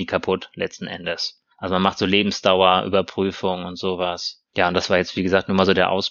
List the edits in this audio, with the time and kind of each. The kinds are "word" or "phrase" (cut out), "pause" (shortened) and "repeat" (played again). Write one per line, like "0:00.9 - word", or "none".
0:01.5 - pause